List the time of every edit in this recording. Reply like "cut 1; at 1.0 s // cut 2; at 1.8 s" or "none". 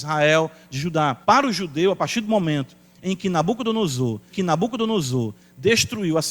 cut 1; at 1.2 s // cut 2; at 4.3 s

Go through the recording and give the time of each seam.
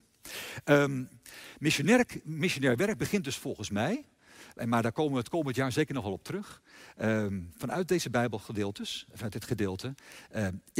none

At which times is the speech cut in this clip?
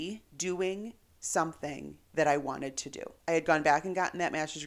none

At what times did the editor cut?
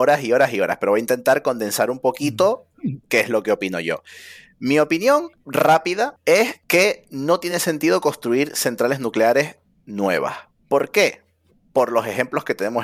none

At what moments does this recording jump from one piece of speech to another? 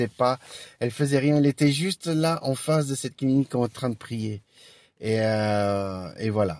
none

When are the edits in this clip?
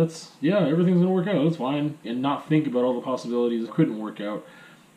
cut 1; at 2.0 s // cut 2; at 3.7 s

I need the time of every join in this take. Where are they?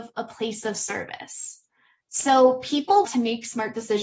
cut 1; at 3.0 s

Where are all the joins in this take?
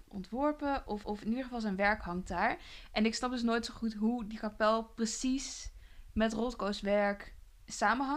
cut 1; at 1.0 s

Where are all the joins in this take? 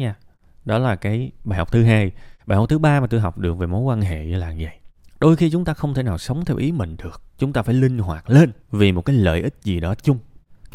cut 1; at 2.4 s // cut 2; at 7.3 s // cut 3; at 8.6 s

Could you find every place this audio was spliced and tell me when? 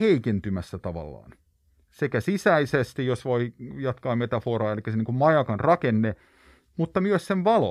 none

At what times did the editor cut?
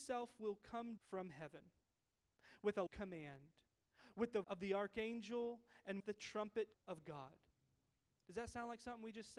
cut 1; at 1.0 s // cut 2; at 2.9 s // cut 3; at 4.4 s // cut 4; at 6.0 s // cut 5; at 6.7 s

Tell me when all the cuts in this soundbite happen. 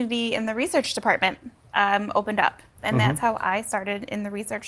none

